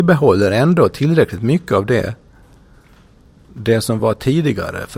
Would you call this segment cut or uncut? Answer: uncut